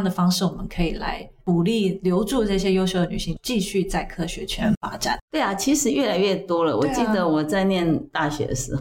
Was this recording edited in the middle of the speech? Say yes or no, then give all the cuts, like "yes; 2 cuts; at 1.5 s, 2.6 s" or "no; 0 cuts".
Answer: yes; 1 cut; at 5.2 s